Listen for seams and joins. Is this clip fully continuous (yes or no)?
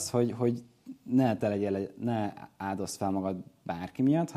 yes